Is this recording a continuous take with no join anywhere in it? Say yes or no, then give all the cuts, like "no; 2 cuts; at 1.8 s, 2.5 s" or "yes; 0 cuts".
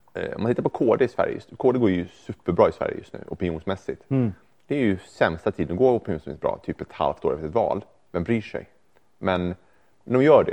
yes; 0 cuts